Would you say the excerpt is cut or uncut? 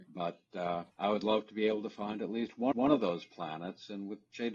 cut